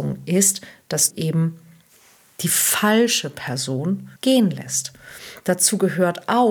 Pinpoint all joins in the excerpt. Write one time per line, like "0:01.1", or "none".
0:01.1
0:04.2